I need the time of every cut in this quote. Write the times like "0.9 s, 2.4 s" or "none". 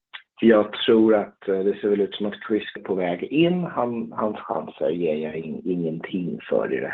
2.8 s